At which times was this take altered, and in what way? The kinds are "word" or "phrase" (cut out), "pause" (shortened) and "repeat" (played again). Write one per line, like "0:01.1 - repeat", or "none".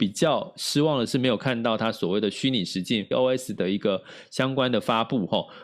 0:03.1 - word